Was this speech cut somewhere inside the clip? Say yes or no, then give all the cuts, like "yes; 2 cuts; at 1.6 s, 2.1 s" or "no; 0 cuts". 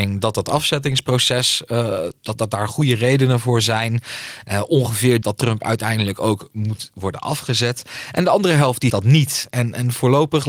yes; 3 cuts; at 2.3 s, 5.2 s, 8.9 s